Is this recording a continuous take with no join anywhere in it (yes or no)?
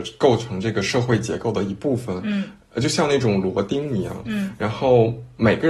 yes